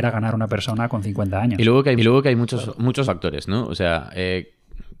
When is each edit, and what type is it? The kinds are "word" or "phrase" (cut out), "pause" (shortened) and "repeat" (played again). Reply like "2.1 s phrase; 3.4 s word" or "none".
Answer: 2.0 s repeat; 3.0 s word